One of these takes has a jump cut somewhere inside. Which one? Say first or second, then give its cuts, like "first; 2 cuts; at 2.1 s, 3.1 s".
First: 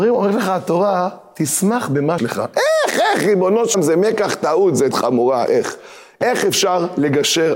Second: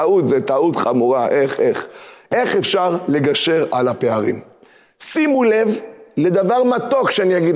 first; 4 cuts; at 2.2 s, 3.7 s, 4.9 s, 5.5 s